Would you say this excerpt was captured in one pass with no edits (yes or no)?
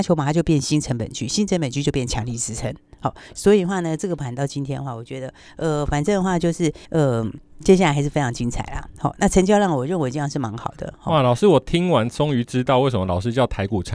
no